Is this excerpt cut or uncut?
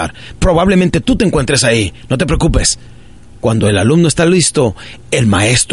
uncut